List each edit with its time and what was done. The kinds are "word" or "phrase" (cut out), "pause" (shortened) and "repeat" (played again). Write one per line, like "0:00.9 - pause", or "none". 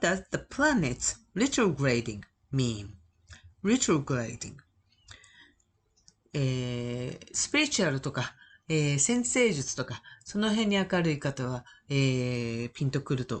0:03.5 - word